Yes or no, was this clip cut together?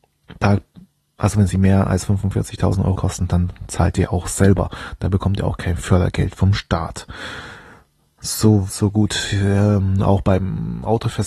yes